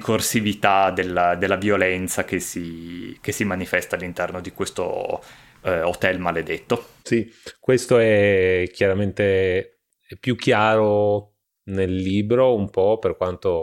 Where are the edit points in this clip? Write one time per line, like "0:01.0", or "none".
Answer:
0:07.0
0:11.4